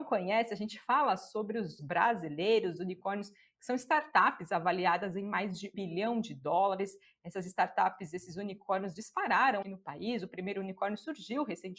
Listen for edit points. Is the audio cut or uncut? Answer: cut